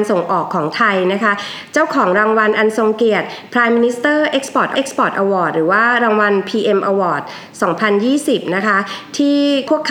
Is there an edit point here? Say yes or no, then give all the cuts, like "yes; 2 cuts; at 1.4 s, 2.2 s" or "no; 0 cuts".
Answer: yes; 1 cut; at 4.7 s